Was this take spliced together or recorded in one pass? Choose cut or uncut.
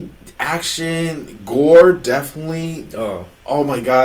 uncut